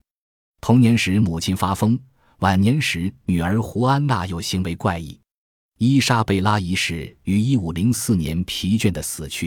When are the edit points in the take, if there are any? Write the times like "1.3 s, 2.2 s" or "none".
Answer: none